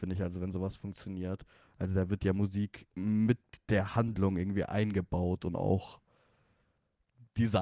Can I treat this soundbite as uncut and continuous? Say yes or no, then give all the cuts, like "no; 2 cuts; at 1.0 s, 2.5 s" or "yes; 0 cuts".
yes; 0 cuts